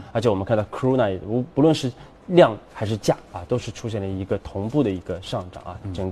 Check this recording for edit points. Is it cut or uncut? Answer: uncut